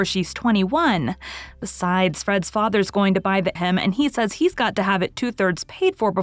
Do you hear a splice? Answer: yes; 1 cut; at 3.6 s

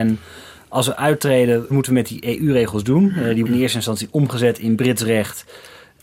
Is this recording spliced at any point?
yes; 2 cuts; at 1.7 s, 3.5 s

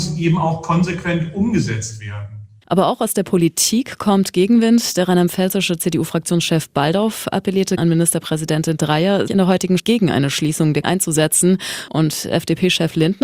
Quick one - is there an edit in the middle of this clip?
yes; 4 cuts; at 7.8 s, 9.3 s, 9.8 s, 10.8 s

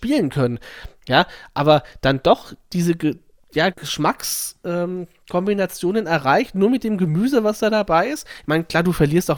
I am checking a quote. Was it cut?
yes; 1 cut; at 3.7 s

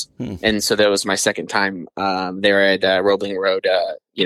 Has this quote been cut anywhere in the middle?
no; 0 cuts

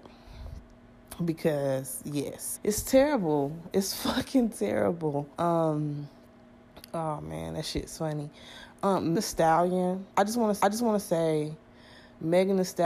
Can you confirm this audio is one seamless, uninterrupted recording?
no; 5 cuts; at 2.6 s, 5.3 s, 9.2 s, 10.1 s, 10.6 s

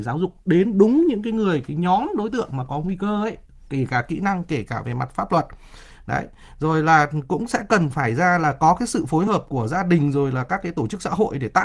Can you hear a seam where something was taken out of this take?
no; 0 cuts

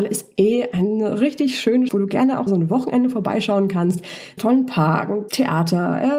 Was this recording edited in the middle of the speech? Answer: yes; 4 cuts; at 1.9 s, 2.5 s, 4.4 s, 5.3 s

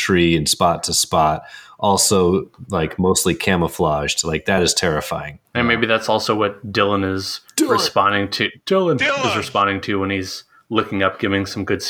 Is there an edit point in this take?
no; 0 cuts

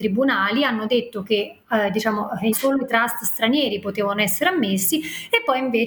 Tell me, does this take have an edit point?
yes; 1 cut; at 2.5 s

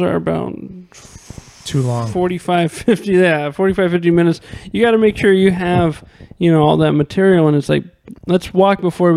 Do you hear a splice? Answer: no; 0 cuts

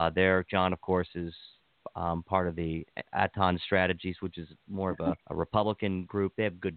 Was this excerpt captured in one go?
no; 1 cut; at 5.2 s

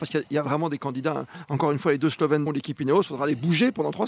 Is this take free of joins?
no; 1 cut; at 2.5 s

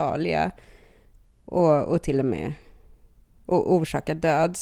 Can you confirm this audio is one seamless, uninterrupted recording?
yes; 0 cuts

